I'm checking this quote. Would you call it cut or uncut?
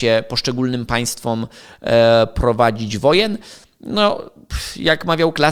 uncut